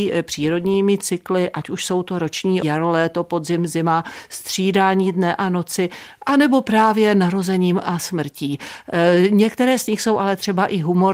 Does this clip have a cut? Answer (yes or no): yes